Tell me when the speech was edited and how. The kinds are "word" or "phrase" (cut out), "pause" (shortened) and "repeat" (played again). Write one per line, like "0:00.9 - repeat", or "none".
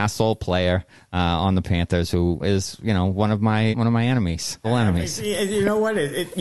0:02.4 - word
0:03.7 - word
0:04.6 - word